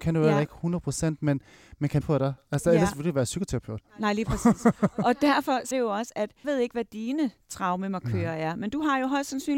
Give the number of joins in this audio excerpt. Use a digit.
3